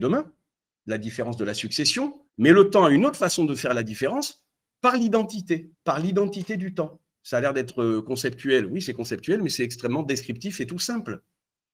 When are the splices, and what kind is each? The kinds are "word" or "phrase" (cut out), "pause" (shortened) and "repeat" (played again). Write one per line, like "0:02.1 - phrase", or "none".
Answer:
0:02.3 - pause
0:04.7 - pause
0:05.7 - pause
0:07.1 - pause